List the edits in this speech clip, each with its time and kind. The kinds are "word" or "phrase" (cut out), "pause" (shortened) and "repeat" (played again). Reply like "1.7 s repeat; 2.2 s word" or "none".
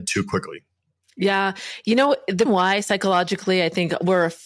2.5 s word